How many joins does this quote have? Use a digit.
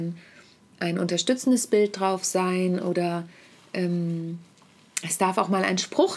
0